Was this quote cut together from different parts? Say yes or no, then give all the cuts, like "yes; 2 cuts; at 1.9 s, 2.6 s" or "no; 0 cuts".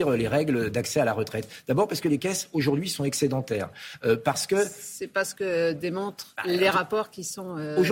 yes; 1 cut; at 6.4 s